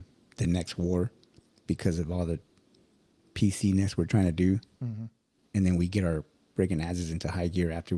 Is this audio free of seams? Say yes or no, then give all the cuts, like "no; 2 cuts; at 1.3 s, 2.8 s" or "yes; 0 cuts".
yes; 0 cuts